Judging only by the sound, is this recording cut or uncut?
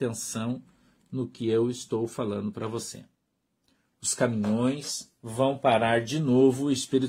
uncut